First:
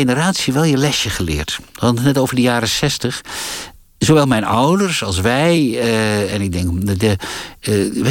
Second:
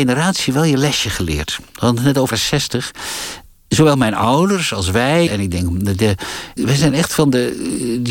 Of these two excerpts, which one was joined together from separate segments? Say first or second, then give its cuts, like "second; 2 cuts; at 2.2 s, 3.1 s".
second; 3 cuts; at 2.3 s, 5.3 s, 6.6 s